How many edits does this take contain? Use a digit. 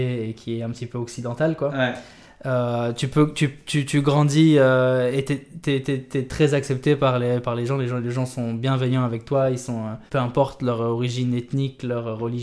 1